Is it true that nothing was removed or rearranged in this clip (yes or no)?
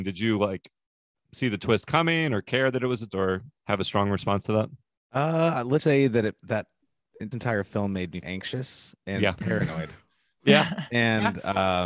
no